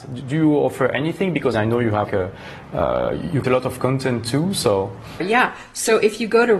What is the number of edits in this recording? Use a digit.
4